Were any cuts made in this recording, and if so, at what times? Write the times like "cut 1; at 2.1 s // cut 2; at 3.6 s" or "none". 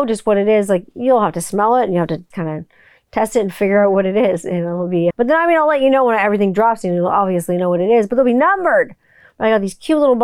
cut 1; at 2.3 s // cut 2; at 5.1 s